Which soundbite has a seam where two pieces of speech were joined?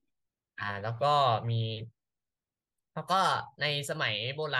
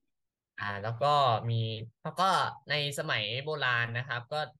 second; 1 cut; at 2.0 s

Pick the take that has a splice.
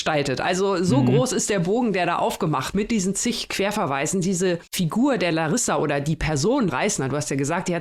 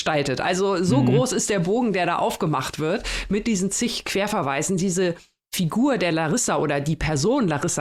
first; 3 cuts; at 2.7 s, 4.7 s, 6.7 s

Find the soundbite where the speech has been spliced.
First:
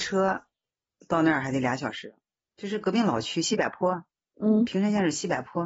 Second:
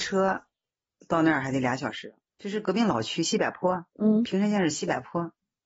second; 2 cuts; at 2.3 s, 3.9 s

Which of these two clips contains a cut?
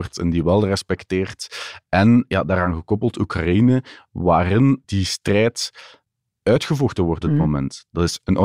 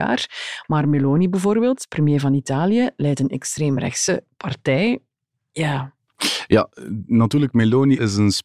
first; 2 cuts; at 4.8 s, 7.2 s

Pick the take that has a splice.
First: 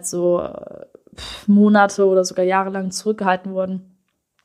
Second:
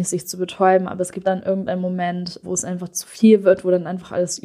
second; 2 cuts; at 1.2 s, 2.4 s

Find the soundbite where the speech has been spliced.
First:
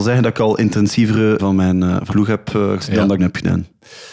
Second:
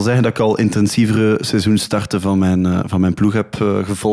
first; 4 cuts; at 1.4 s, 2.1 s, 2.8 s, 3.2 s

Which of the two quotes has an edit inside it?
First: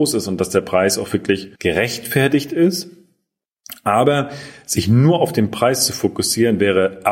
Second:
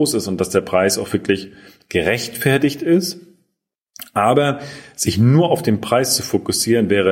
first; 1 cut; at 1.5 s

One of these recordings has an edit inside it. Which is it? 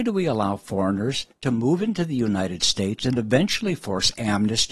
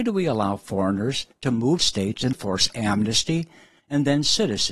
second; 2 cuts; at 1.8 s, 2.3 s

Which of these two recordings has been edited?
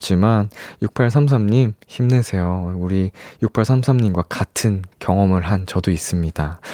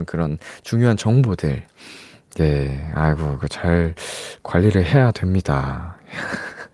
first; 2 cuts; at 1.8 s, 4.9 s

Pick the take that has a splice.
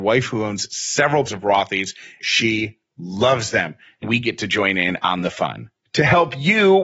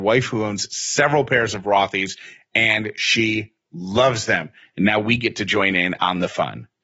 first; 3 cuts; at 1.3 s, 2.2 s, 4.0 s

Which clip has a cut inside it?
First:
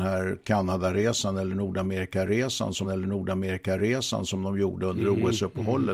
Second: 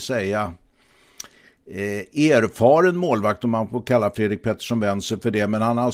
first; 1 cut; at 2.8 s

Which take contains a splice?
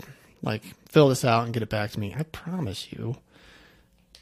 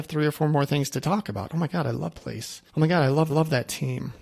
second; 3 cuts; at 2.1 s, 2.7 s, 3.3 s

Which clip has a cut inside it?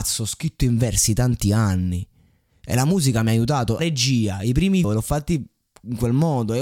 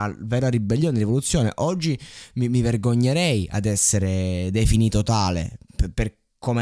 first; 2 cuts; at 3.8 s, 4.8 s

